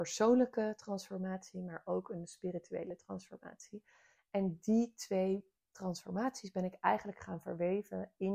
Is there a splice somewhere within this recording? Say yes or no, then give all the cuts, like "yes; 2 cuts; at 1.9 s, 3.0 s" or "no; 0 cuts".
no; 0 cuts